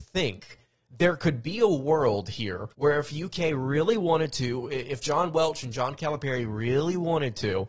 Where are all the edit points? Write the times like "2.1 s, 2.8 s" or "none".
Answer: 2.7 s